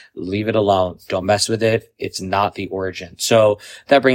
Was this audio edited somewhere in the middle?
no; 0 cuts

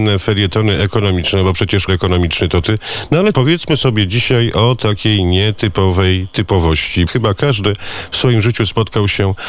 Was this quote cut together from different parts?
yes; 3 cuts; at 1.9 s, 3.3 s, 7.1 s

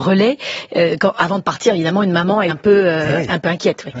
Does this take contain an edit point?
yes; 1 cut; at 2.5 s

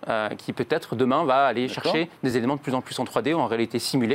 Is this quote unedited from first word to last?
yes; 0 cuts

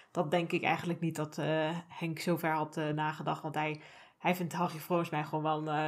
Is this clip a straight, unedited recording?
yes; 0 cuts

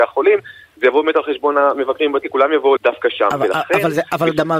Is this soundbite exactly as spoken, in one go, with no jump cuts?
no; 2 cuts; at 2.2 s, 2.8 s

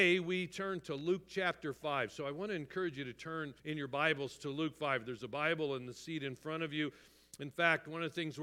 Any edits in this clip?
yes; 1 cut; at 3.6 s

